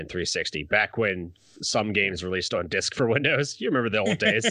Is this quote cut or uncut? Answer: uncut